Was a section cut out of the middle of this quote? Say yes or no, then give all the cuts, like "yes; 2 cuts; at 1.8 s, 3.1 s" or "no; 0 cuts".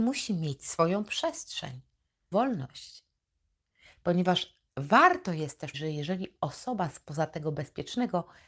yes; 3 cuts; at 2.3 s, 4.7 s, 5.7 s